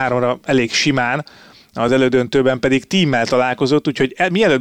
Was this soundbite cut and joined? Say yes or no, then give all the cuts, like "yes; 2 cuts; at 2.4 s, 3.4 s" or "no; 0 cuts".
no; 0 cuts